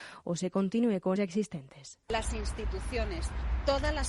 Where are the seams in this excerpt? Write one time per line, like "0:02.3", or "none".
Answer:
0:01.2
0:02.0